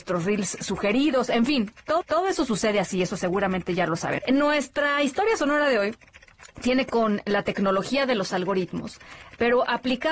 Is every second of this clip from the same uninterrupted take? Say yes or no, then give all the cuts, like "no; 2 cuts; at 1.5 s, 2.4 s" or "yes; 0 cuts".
no; 3 cuts; at 2.0 s, 4.2 s, 6.9 s